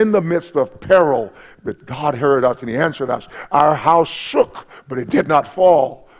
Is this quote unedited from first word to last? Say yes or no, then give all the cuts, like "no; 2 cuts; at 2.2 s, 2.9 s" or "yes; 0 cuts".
yes; 0 cuts